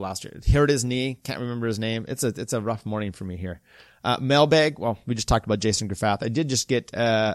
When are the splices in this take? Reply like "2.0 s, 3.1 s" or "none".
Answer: none